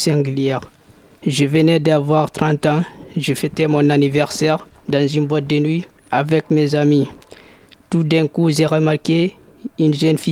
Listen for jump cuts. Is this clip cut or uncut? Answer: uncut